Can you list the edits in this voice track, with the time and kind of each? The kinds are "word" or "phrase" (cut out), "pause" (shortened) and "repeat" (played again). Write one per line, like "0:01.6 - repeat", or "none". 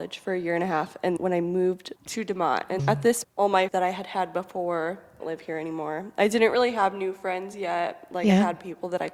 0:01.2 - word
0:02.0 - word
0:02.8 - word
0:03.2 - word
0:03.7 - word
0:05.2 - word